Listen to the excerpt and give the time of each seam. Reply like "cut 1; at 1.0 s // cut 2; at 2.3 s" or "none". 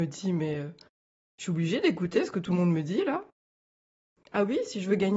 none